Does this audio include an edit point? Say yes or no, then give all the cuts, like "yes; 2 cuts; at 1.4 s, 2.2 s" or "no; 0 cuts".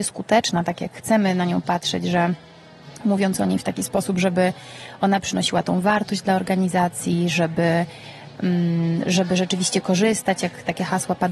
no; 0 cuts